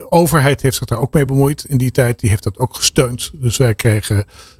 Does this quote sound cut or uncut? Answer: uncut